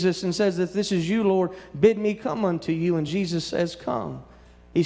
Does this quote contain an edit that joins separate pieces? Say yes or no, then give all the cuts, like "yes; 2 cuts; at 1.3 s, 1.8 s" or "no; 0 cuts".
no; 0 cuts